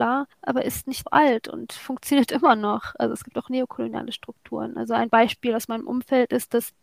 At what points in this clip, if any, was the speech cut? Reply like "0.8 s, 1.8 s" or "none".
1.1 s